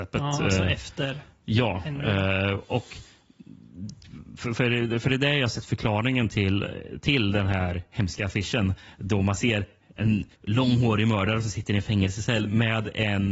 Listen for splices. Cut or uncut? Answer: cut